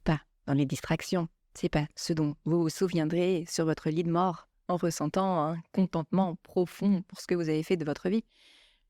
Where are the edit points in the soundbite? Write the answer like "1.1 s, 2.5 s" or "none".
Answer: none